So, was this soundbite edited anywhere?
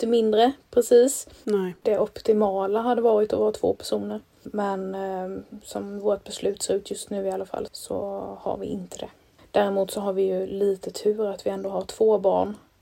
no; 0 cuts

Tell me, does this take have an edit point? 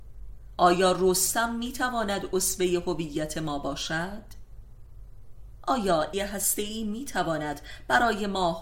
yes; 1 cut; at 6.1 s

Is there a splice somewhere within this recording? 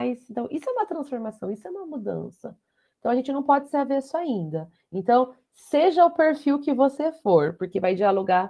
no; 0 cuts

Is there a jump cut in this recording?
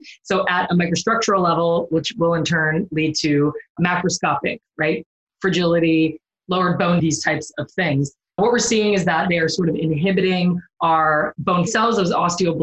yes; 4 cuts; at 3.8 s, 7.0 s, 8.4 s, 11.7 s

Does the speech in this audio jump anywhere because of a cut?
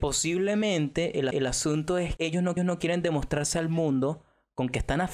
yes; 3 cuts; at 1.3 s, 2.2 s, 2.6 s

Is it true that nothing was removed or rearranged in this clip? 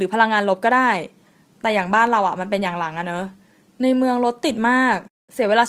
yes; 0 cuts

